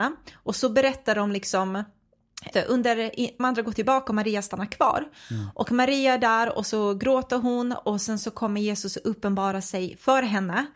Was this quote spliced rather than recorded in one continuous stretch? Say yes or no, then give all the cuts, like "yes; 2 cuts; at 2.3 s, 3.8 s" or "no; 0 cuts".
yes; 2 cuts; at 2.5 s, 3.4 s